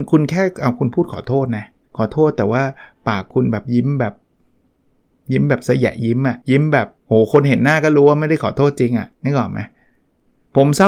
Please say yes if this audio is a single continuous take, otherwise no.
no